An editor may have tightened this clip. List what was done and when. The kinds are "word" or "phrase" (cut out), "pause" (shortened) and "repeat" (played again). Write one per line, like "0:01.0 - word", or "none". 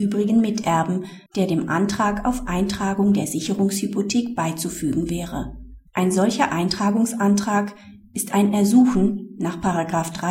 0:01.3 - pause
0:05.9 - pause